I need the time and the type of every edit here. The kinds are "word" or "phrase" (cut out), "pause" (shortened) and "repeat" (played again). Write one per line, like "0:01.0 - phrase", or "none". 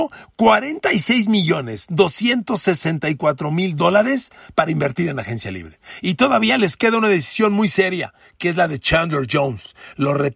none